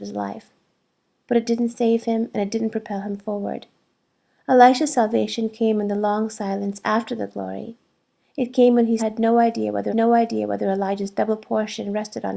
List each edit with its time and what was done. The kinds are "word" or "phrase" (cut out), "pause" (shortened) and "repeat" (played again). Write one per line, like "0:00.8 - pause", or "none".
0:09.0 - word
0:09.9 - repeat